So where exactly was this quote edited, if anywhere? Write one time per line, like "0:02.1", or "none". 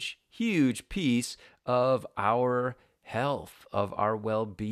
none